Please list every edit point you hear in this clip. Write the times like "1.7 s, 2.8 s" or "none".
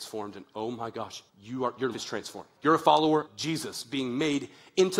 1.3 s, 1.9 s, 2.6 s, 3.3 s